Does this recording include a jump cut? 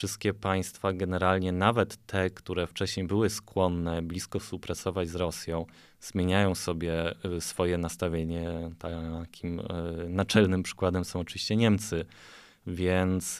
no; 0 cuts

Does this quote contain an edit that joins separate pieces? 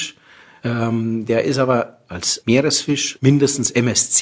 no; 0 cuts

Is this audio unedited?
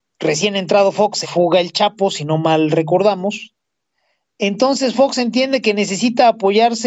no; 1 cut; at 1.2 s

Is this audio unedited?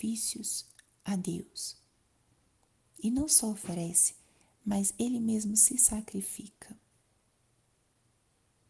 yes; 0 cuts

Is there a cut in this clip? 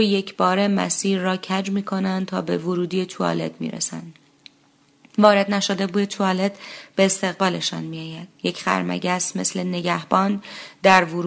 no; 0 cuts

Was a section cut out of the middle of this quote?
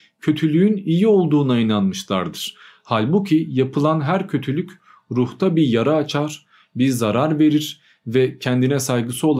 no; 0 cuts

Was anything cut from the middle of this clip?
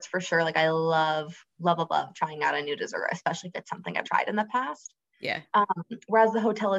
yes; 1 cut; at 4.0 s

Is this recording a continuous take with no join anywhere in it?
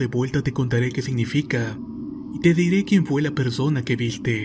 yes; 0 cuts

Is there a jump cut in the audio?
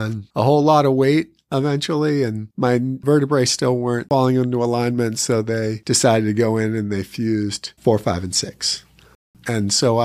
yes; 2 cuts; at 2.5 s, 7.8 s

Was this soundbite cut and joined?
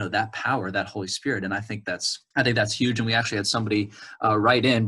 yes; 1 cut; at 2.3 s

